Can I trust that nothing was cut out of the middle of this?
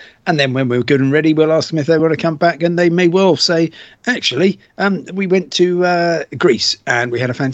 yes; 0 cuts

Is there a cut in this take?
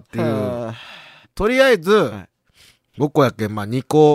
yes; 1 cut; at 1.2 s

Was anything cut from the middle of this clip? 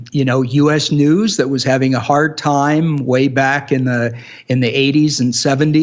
no; 0 cuts

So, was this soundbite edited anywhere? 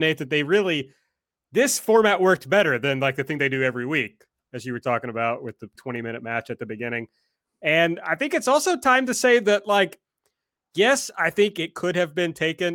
yes; 1 cut; at 5.8 s

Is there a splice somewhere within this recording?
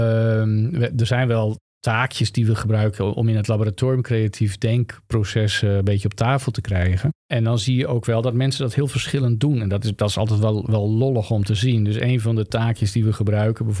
yes; 2 cuts; at 1.7 s, 7.2 s

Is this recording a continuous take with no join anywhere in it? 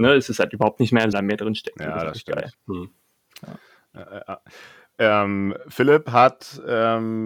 no; 1 cut; at 1.1 s

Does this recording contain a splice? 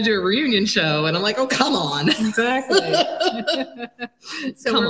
no; 0 cuts

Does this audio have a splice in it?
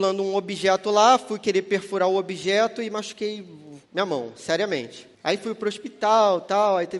yes; 2 cuts; at 3.8 s, 5.1 s

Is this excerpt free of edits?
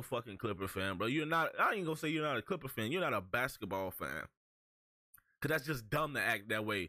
yes; 0 cuts

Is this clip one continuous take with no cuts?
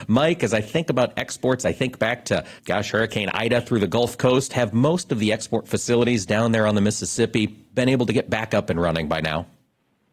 no; 1 cut; at 2.6 s

